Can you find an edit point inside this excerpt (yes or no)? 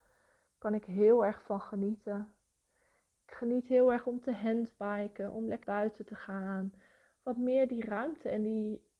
yes